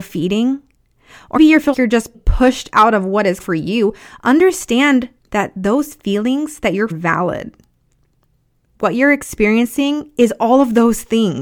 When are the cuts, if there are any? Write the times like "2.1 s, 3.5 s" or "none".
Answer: 1.4 s, 1.7 s, 2.1 s, 3.4 s, 5.2 s, 6.9 s

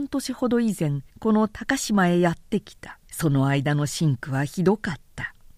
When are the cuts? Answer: 1.1 s, 3.1 s

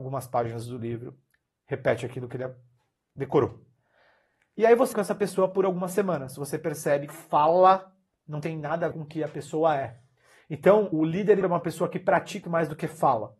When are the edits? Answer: 4.9 s, 7.1 s, 8.9 s, 10.9 s, 11.4 s, 12.4 s

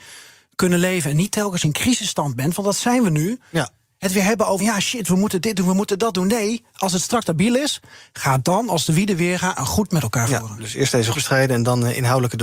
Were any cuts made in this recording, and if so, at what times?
1.6 s, 4.6 s, 7.2 s, 9.9 s, 11.1 s

